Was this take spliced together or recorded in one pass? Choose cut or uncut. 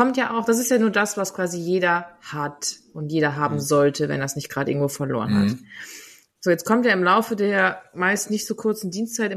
uncut